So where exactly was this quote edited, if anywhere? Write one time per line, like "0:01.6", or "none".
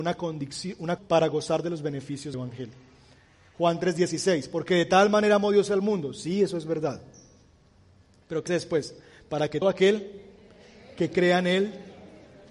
0:01.0
0:02.3
0:08.5
0:09.6